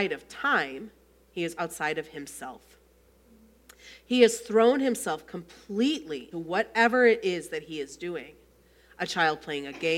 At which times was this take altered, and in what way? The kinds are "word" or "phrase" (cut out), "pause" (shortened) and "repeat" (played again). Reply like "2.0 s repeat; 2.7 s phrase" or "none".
1.6 s word; 6.3 s word